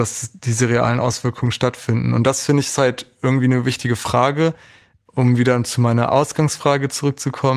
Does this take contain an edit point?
no; 0 cuts

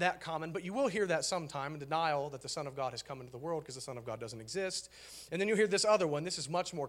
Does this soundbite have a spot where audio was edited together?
no; 0 cuts

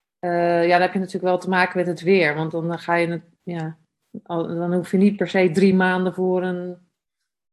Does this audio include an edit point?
no; 0 cuts

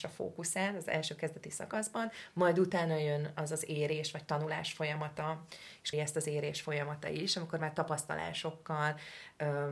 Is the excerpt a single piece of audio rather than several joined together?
no; 1 cut; at 5.9 s

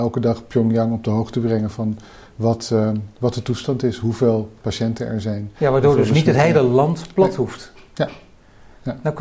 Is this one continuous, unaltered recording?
yes; 0 cuts

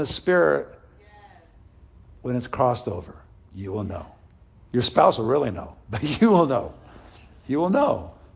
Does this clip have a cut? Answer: no; 0 cuts

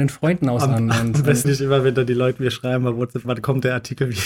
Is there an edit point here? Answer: yes; 1 cut; at 1.4 s

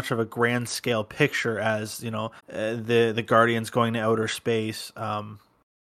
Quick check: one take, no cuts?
no; 1 cut; at 2.4 s

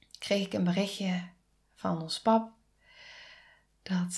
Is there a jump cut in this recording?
no; 0 cuts

